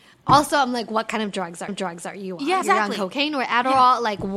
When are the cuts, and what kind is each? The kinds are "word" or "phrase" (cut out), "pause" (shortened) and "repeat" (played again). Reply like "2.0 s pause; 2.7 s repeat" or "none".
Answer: 1.7 s repeat; 2.6 s word

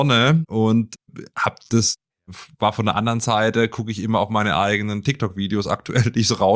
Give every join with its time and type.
none

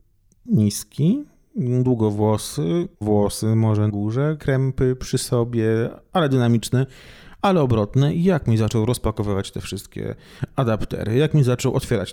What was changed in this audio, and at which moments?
3.0 s word; 3.9 s word

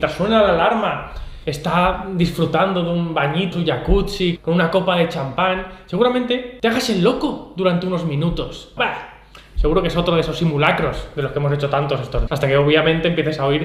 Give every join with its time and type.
3.5 s word; 4.4 s word; 8.8 s word; 12.3 s word

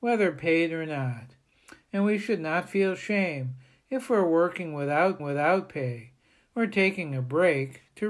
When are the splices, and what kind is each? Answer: 5.2 s repeat

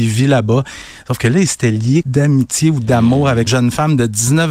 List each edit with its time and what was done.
2.0 s word; 3.5 s word

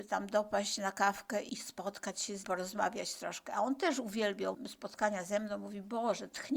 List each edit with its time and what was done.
2.4 s phrase

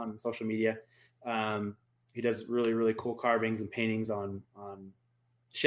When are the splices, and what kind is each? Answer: none

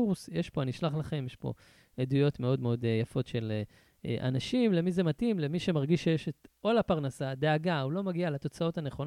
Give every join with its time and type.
none

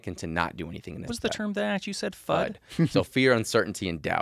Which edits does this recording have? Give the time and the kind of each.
1.1 s phrase

